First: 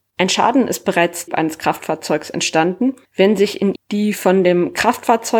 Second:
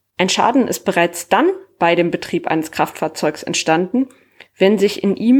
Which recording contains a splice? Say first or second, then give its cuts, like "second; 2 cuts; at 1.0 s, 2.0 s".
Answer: first; 3 cuts; at 1.3 s, 3.0 s, 3.8 s